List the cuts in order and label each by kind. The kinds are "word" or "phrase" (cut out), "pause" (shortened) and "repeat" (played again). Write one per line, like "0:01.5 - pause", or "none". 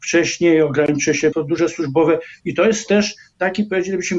0:01.3 - word